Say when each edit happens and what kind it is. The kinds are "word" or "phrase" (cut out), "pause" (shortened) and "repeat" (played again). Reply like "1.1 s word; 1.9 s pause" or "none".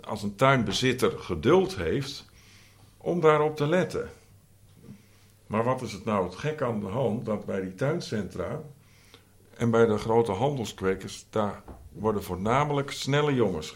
none

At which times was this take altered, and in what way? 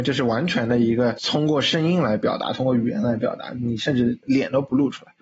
none

